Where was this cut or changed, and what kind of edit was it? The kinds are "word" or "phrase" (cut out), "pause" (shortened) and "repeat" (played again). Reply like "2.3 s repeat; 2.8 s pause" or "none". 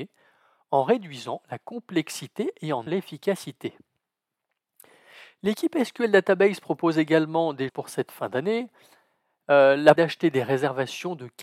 2.9 s word; 7.7 s word; 10.0 s word